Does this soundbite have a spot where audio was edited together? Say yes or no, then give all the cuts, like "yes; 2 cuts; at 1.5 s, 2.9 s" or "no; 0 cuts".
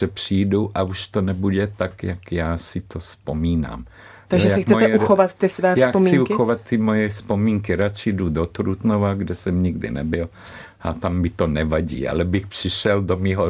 no; 0 cuts